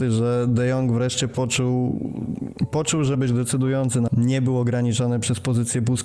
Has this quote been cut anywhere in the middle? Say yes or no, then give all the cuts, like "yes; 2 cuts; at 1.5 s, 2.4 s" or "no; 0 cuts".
yes; 2 cuts; at 3.1 s, 4.1 s